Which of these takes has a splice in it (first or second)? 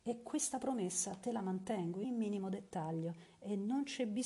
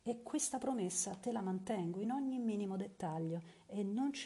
first